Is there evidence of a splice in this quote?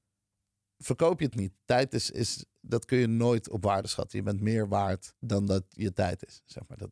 yes; 2 cuts; at 1.3 s, 5.2 s

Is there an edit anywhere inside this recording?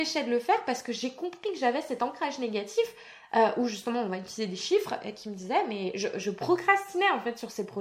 no; 0 cuts

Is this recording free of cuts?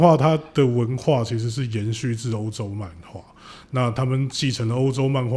yes; 0 cuts

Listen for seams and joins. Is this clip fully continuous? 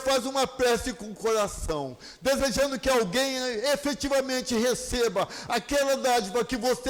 yes; 0 cuts

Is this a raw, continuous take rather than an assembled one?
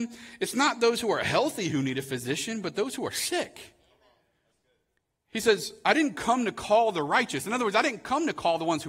yes; 0 cuts

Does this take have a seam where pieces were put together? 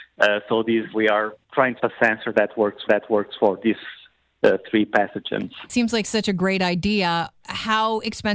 yes; 4 cuts; at 0.9 s, 1.4 s, 1.8 s, 2.9 s

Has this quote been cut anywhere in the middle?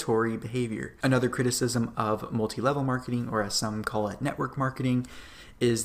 no; 0 cuts

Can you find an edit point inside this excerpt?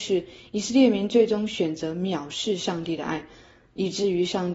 no; 0 cuts

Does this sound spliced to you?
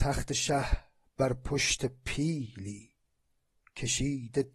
no; 0 cuts

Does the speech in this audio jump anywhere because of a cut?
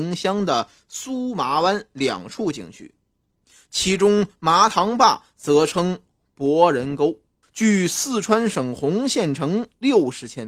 yes; 1 cut; at 7.4 s

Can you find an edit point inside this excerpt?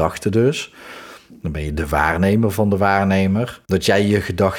yes; 1 cut; at 3.6 s

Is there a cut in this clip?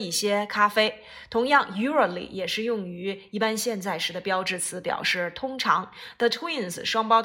no; 0 cuts

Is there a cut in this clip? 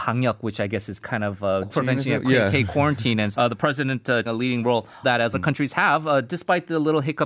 yes; 6 cuts; at 1.0 s, 1.7 s, 3.3 s, 4.3 s, 5.0 s, 5.3 s

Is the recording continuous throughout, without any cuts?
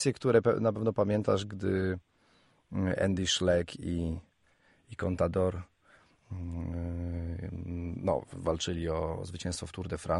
yes; 0 cuts

